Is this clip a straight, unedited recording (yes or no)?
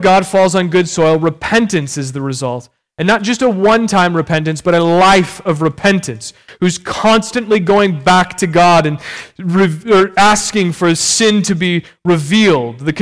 yes